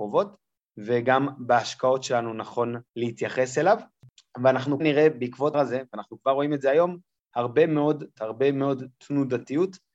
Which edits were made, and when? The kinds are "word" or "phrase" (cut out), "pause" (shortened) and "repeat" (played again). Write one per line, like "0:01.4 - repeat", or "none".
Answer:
0:02.9 - pause
0:04.8 - word
0:05.5 - word
0:08.2 - word